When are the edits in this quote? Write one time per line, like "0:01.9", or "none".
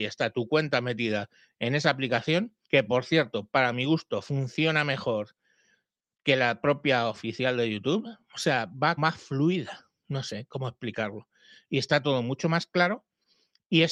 0:02.6
0:09.0

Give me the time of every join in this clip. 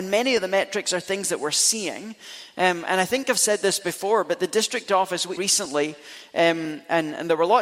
0:05.4

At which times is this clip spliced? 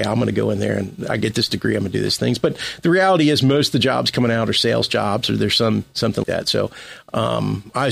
0:06.2

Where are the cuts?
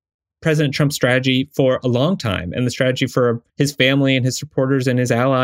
0:03.5

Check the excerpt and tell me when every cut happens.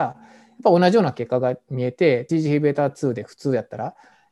0:02.3

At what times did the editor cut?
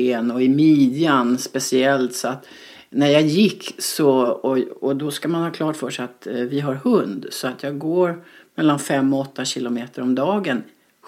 none

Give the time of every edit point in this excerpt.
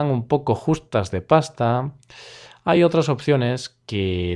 none

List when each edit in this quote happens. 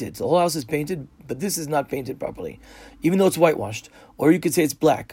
none

